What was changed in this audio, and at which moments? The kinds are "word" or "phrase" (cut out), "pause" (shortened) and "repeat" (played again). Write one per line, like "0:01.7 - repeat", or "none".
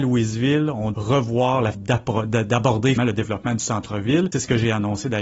0:00.9 - word
0:01.7 - word
0:03.0 - word
0:04.3 - word